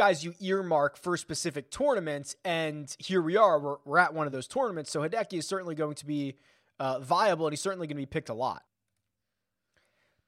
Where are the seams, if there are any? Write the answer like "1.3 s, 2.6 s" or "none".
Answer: none

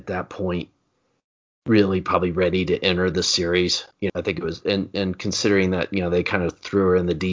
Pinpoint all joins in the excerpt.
3.9 s

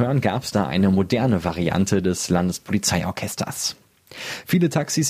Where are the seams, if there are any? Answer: none

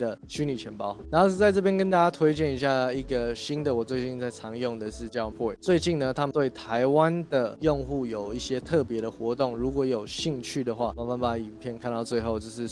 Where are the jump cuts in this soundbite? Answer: 5.3 s

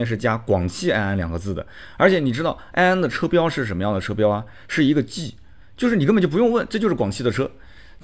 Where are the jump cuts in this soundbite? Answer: none

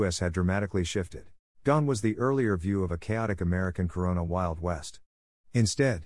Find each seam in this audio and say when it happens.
1.5 s

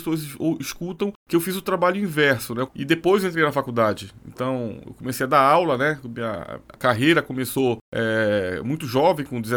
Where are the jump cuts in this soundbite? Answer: 2.7 s, 6.7 s

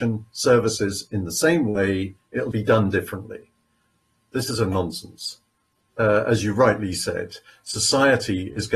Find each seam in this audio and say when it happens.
2.5 s

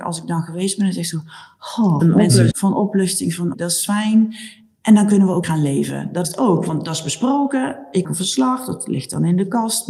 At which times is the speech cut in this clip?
2.0 s, 2.5 s, 3.5 s, 5.4 s, 6.2 s, 8.0 s

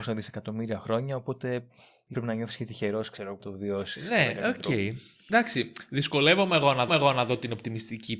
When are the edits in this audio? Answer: 2.1 s, 3.4 s, 6.9 s

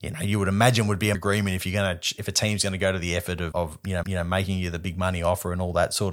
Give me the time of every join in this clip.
1.1 s, 3.5 s, 4.0 s

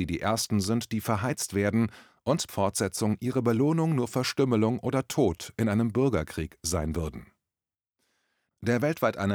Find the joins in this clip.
2.5 s

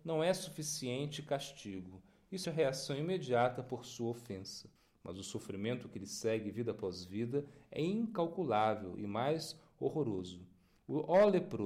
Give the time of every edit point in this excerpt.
2.4 s, 4.8 s

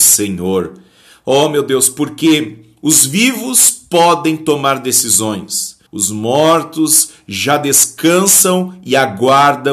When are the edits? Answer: 5.9 s

